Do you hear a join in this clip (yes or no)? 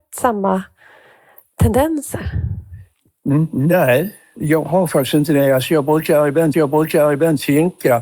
yes